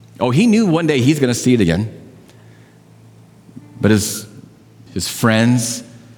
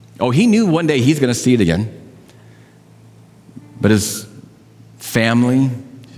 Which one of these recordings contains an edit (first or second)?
first